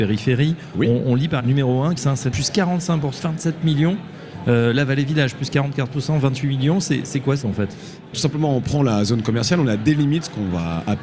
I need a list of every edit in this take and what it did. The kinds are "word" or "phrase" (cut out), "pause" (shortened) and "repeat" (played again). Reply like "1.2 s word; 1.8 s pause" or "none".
1.4 s word; 2.0 s word; 2.3 s word; 3.2 s word; 7.4 s word; 8.1 s word

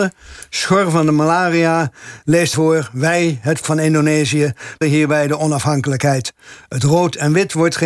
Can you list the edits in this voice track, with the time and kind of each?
2.5 s word; 3.6 s word; 4.8 s word

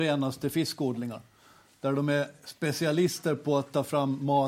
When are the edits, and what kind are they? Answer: none

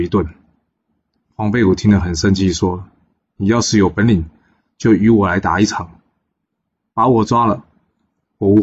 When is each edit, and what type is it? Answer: none

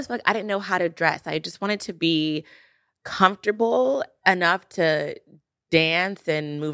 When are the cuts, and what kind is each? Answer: none

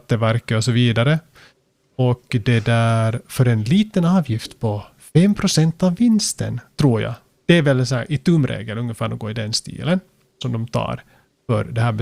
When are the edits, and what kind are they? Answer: none

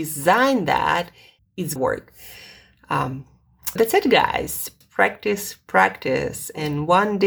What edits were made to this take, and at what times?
1.4 s word; 1.8 s word; 3.8 s word; 4.8 s word

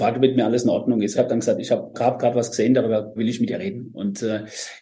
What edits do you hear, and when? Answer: 1.1 s word; 1.9 s word; 3.2 s word

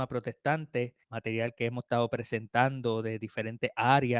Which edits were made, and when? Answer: 1.0 s pause

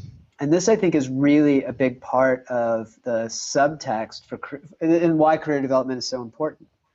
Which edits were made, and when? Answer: none

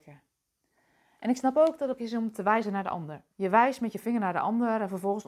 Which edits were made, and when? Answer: 2.0 s word; 3.3 s pause

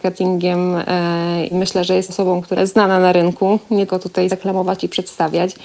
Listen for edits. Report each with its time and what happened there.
1.5 s word; 2.1 s word; 2.6 s word; 3.9 s word; 4.3 s word

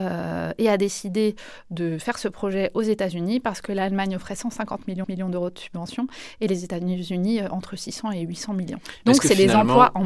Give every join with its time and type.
5.0 s repeat

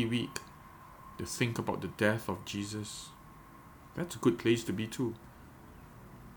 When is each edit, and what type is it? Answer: none

